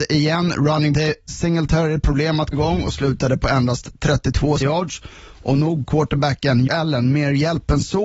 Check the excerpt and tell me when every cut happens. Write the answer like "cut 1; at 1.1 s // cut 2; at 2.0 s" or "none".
cut 1; at 0.9 s // cut 2; at 1.3 s // cut 3; at 2.5 s // cut 4; at 4.6 s // cut 5; at 5.8 s // cut 6; at 6.7 s

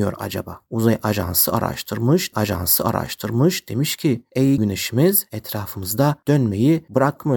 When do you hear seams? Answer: cut 1; at 2.3 s // cut 2; at 4.6 s

